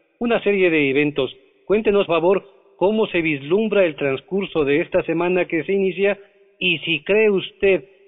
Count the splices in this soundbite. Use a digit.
1